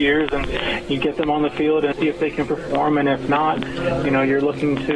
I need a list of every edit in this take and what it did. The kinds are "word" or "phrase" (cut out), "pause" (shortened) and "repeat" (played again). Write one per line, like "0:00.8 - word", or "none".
0:01.9 - word